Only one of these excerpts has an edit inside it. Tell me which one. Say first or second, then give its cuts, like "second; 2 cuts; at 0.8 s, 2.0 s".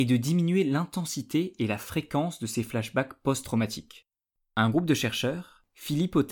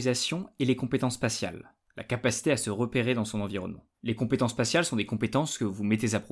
second; 1 cut; at 3.9 s